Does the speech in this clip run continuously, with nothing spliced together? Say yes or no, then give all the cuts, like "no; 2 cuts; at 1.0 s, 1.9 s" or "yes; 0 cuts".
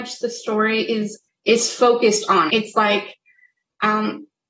no; 2 cuts; at 1.3 s, 2.5 s